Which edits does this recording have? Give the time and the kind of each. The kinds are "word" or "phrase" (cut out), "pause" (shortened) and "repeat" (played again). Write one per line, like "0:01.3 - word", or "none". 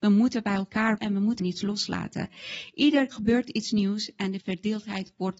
0:01.0 - word
0:01.4 - word
0:03.1 - word
0:04.4 - word